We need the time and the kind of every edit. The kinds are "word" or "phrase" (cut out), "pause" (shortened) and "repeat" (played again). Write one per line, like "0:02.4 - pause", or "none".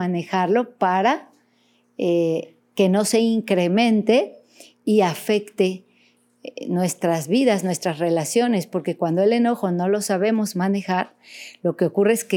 none

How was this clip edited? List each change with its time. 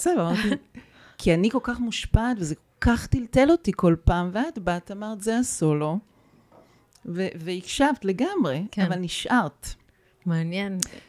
none

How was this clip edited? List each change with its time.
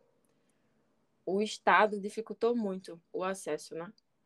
0:03.0 - pause

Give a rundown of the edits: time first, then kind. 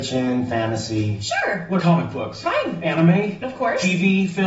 0:01.8 - word

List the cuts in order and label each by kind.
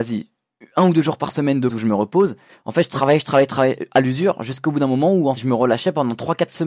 0:01.7 - word
0:05.4 - word

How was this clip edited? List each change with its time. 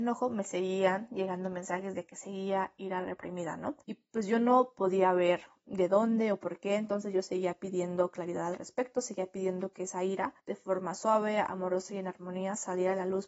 0:03.8 - pause
0:10.4 - pause

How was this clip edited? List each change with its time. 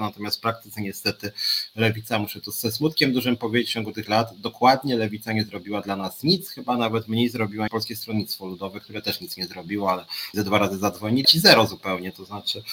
0:04.1 - word
0:07.7 - word
0:10.3 - word
0:11.2 - word

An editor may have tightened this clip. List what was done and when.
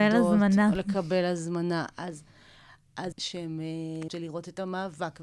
0:03.1 - word
0:04.1 - phrase

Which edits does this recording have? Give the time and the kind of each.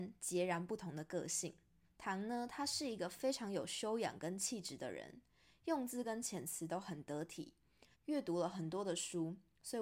0:01.8 - pause
0:07.9 - pause

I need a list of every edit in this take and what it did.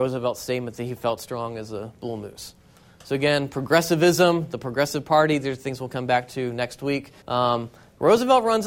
0:07.2 - pause

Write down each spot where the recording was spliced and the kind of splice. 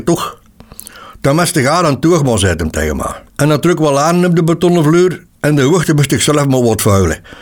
0:03.3 - pause
0:05.3 - pause

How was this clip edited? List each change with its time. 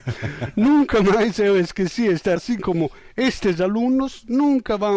0:02.4 - word

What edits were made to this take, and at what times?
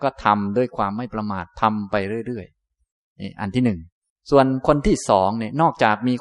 0:04.1 - pause

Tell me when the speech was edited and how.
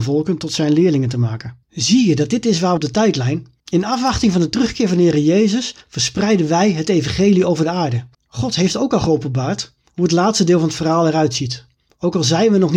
0:01.6 - pause
0:02.8 - phrase
0:03.6 - pause
0:08.1 - pause

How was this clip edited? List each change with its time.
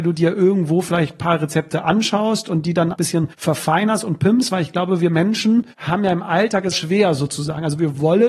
0:02.9 - word
0:03.3 - pause
0:05.7 - pause
0:06.7 - word

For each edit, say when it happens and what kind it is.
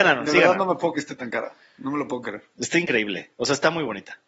0:00.9 - word

